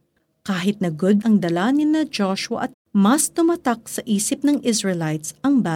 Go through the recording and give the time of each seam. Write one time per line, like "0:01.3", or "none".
0:01.2
0:02.7